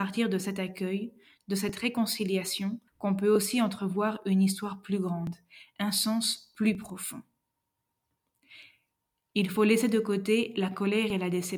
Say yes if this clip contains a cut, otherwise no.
yes